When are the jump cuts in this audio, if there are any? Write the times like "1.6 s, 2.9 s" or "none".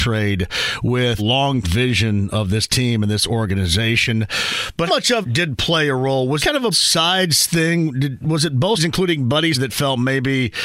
1.2 s, 1.6 s, 4.9 s, 5.2 s, 6.4 s, 6.7 s, 8.8 s, 9.5 s